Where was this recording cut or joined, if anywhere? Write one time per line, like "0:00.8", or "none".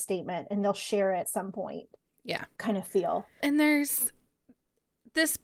0:01.2
0:02.6
0:03.4